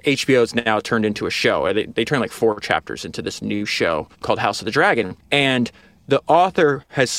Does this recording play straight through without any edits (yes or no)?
no